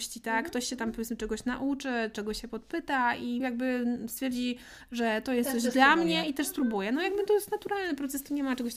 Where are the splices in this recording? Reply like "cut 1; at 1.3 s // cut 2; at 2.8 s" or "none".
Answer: none